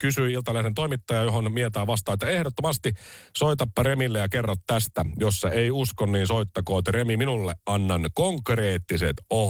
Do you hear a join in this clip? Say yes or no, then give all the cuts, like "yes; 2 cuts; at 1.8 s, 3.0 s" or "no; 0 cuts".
no; 0 cuts